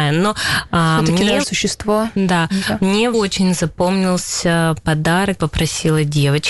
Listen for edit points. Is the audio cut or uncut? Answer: cut